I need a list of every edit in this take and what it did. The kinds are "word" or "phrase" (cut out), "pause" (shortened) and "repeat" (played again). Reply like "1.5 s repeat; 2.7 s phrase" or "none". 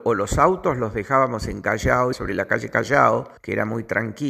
2.1 s phrase; 3.4 s pause